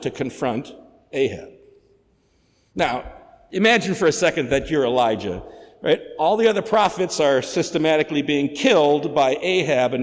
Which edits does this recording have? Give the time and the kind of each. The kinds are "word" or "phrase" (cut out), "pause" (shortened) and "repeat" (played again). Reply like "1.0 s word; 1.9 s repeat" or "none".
none